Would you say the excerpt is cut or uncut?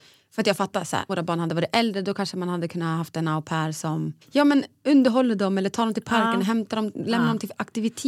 cut